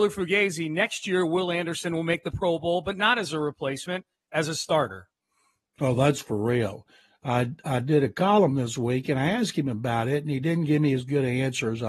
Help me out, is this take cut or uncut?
uncut